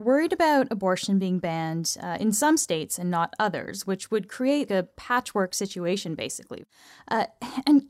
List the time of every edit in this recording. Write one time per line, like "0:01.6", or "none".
0:04.7